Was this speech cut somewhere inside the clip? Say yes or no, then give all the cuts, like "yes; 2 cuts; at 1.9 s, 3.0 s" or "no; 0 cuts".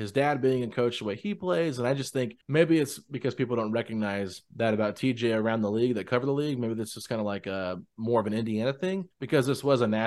yes; 2 cuts; at 2.4 s, 9.1 s